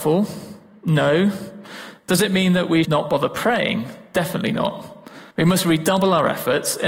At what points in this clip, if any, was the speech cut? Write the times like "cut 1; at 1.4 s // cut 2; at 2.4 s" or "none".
cut 1; at 2.8 s // cut 2; at 5.3 s

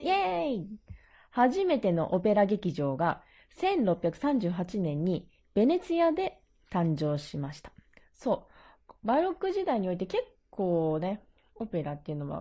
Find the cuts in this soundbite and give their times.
none

